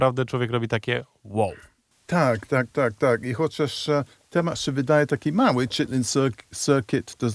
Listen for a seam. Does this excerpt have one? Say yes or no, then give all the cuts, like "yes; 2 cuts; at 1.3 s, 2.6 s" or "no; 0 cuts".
no; 0 cuts